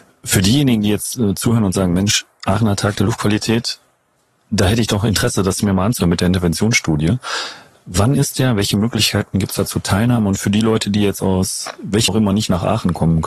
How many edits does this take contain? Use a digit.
1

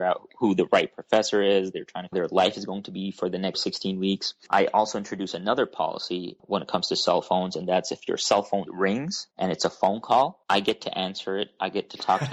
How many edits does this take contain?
5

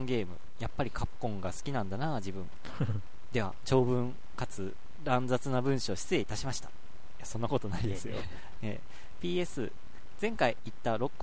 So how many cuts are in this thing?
0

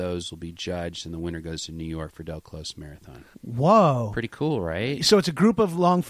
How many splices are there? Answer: 1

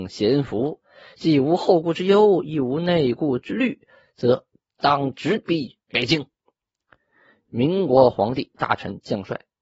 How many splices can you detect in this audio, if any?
0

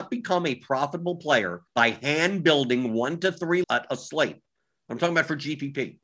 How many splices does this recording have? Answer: 2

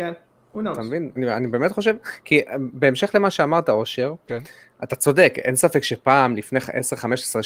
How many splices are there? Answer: 1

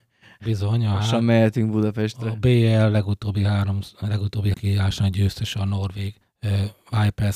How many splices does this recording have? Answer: 2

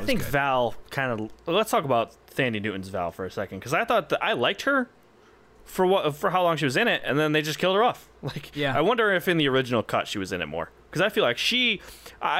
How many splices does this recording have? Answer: 0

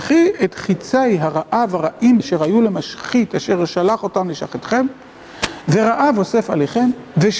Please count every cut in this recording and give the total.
1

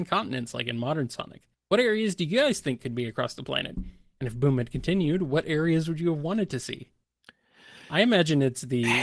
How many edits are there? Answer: 0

